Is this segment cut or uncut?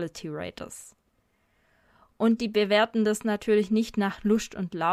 uncut